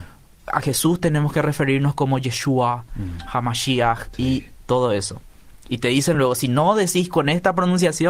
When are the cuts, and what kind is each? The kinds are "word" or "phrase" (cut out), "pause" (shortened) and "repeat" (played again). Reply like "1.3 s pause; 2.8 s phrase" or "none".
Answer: none